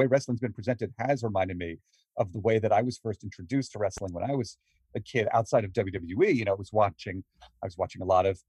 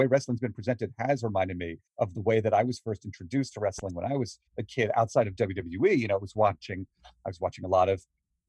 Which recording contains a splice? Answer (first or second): second